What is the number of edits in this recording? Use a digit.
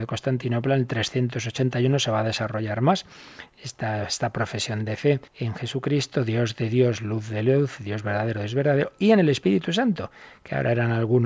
1